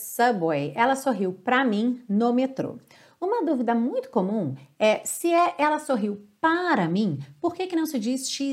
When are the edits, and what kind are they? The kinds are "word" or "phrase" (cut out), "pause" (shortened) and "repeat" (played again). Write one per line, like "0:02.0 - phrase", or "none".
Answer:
none